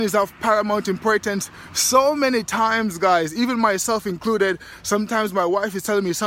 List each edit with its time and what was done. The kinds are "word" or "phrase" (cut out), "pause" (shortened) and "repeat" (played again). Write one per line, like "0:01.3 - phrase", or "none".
none